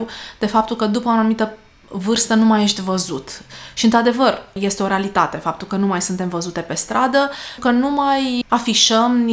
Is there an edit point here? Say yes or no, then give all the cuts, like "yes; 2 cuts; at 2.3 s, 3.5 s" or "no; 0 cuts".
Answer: yes; 2 cuts; at 7.6 s, 8.4 s